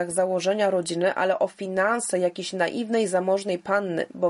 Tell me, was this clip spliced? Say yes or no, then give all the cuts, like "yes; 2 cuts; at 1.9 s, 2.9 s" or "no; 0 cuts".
no; 0 cuts